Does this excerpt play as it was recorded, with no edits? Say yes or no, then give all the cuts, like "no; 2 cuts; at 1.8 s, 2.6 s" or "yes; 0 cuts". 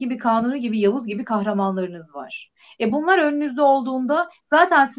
yes; 0 cuts